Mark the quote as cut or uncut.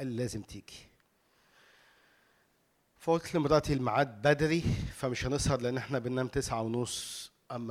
uncut